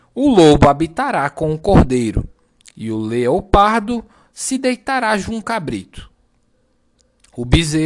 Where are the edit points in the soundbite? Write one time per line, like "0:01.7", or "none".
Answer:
0:05.4